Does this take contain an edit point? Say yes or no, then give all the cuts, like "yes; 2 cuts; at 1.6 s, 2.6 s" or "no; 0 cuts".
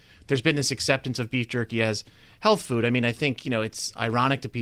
no; 0 cuts